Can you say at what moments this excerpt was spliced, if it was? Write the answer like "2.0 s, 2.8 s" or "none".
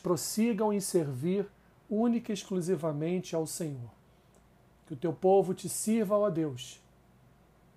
none